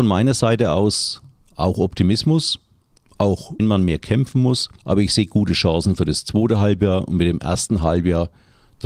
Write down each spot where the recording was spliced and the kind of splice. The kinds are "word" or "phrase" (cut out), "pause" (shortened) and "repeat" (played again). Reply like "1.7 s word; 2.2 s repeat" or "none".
3.6 s word; 4.8 s pause